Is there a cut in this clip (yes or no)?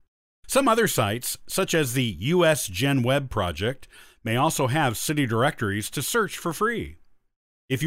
no